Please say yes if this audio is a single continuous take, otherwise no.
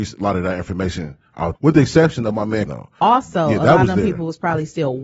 no